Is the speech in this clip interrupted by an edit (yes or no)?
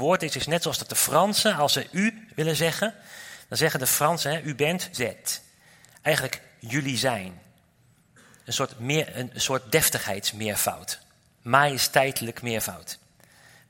yes